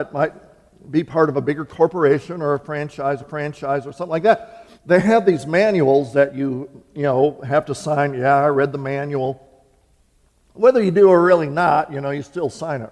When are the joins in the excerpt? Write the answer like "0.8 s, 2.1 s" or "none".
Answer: 3.2 s, 4.8 s